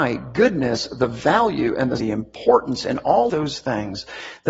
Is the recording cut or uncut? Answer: cut